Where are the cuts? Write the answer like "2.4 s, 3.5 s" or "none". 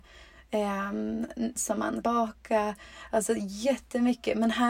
1.6 s, 2.0 s